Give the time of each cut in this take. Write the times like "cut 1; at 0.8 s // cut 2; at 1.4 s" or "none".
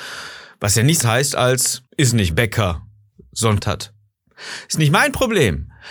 cut 1; at 1.0 s // cut 2; at 1.9 s // cut 3; at 2.3 s // cut 4; at 3.6 s